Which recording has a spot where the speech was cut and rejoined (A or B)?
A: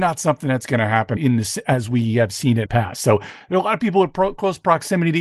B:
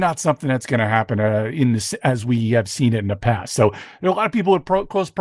A